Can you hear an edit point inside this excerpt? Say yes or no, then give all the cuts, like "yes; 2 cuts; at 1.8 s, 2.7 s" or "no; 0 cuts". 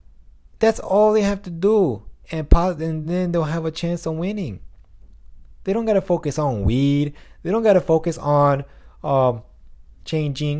no; 0 cuts